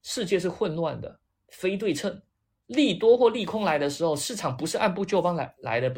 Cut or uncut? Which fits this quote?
uncut